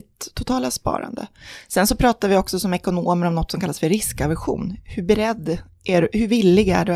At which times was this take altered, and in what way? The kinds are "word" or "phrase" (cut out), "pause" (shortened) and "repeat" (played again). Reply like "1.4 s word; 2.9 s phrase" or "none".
none